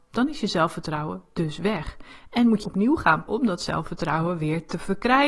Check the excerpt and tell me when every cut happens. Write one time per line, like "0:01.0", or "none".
0:02.6
0:03.3

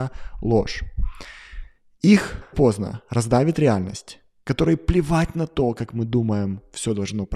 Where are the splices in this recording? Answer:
0:02.5

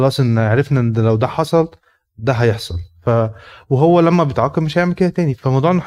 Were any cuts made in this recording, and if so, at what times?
none

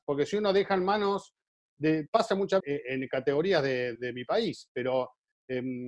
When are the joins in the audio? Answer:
0:02.6
0:03.9

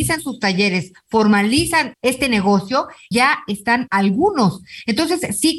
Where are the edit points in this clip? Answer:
0:01.9
0:03.1
0:03.9

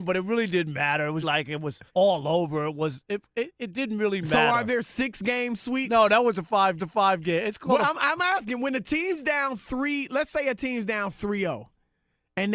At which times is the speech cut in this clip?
0:01.2
0:01.9
0:06.8

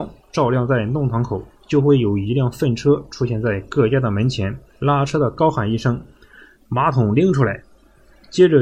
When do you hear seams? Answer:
0:01.5
0:04.7
0:06.1

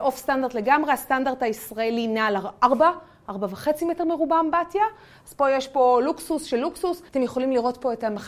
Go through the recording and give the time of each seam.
0:07.1

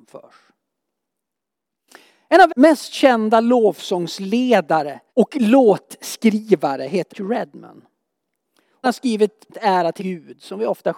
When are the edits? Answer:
0:02.5
0:05.1
0:07.1
0:08.8
0:09.5
0:10.0

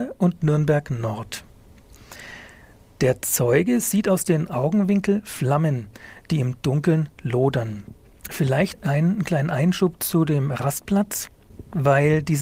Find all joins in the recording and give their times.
none

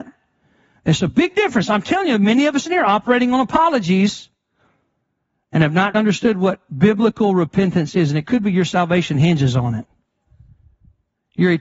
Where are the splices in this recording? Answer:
0:05.9

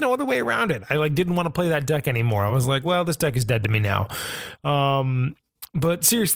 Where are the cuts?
none

